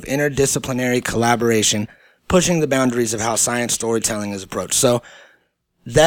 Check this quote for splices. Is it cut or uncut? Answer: uncut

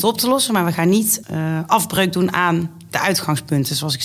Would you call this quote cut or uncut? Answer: cut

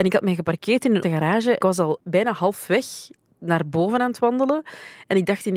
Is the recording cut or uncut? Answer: cut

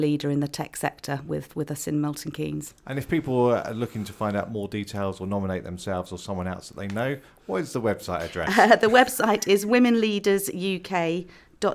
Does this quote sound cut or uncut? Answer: uncut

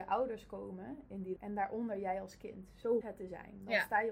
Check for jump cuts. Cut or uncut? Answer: cut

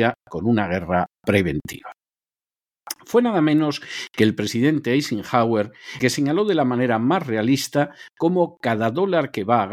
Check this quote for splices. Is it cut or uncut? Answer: cut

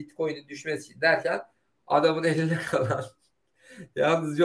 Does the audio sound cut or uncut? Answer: uncut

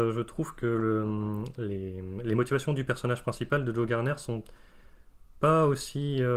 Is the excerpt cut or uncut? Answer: uncut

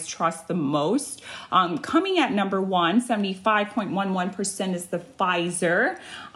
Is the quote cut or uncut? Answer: uncut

